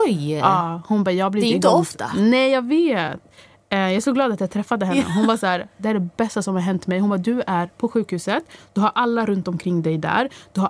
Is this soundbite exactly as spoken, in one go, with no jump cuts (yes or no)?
yes